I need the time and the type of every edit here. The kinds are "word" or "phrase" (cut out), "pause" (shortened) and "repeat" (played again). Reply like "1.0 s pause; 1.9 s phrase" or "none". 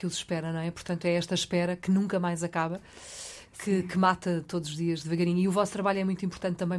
none